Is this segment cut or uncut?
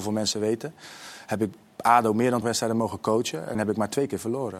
cut